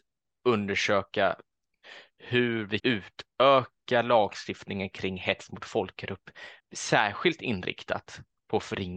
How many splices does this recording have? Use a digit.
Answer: 2